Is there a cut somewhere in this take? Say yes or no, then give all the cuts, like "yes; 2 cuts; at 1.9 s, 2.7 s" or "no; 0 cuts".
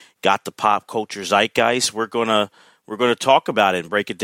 no; 0 cuts